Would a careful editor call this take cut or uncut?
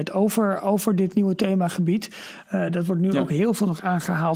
uncut